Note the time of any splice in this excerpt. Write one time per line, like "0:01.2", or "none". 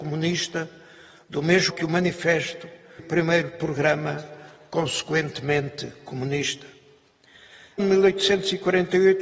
0:01.7
0:03.0
0:07.8